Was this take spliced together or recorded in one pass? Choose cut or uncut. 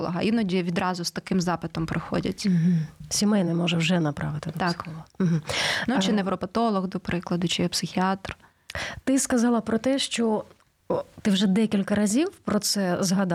uncut